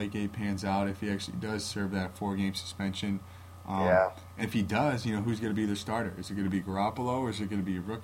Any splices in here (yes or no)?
yes